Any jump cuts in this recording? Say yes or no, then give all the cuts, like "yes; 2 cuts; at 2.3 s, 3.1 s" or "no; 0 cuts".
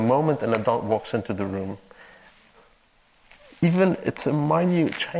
no; 0 cuts